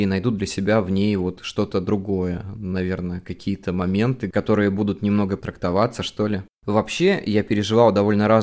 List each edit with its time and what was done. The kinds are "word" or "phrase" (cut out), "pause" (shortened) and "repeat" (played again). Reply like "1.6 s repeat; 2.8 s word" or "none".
5.4 s word; 6.5 s pause